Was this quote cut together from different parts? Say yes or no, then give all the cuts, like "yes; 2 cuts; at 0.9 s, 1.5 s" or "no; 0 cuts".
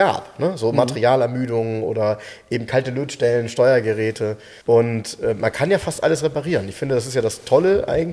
yes; 1 cut; at 4.6 s